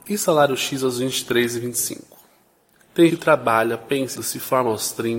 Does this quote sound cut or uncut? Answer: cut